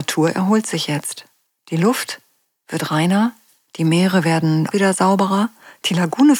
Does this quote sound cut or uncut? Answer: cut